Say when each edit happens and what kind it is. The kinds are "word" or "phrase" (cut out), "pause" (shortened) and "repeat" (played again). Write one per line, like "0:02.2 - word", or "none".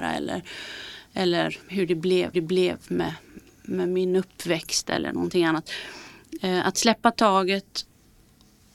0:01.6 - pause
0:02.3 - repeat